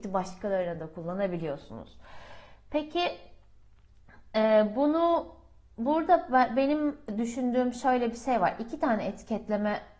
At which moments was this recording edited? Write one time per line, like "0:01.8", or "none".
none